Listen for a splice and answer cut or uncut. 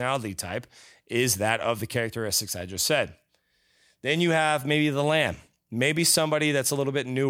uncut